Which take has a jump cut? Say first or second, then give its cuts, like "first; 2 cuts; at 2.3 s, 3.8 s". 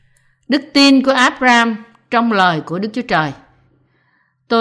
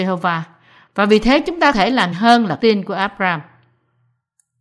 second; 3 cuts; at 1.7 s, 2.1 s, 2.6 s